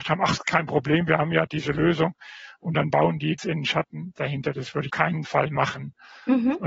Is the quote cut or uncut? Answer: cut